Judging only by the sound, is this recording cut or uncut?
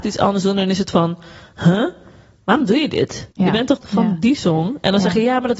cut